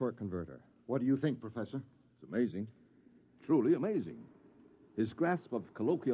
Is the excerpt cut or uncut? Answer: uncut